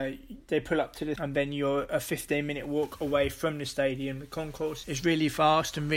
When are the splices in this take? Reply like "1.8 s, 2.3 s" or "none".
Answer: 1.2 s, 4.8 s